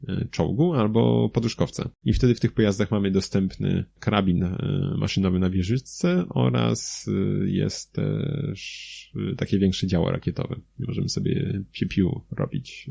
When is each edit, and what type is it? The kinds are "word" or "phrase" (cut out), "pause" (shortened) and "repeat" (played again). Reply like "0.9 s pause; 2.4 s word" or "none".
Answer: 2.0 s pause; 3.9 s pause